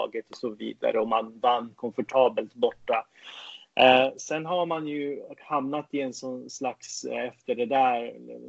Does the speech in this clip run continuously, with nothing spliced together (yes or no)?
yes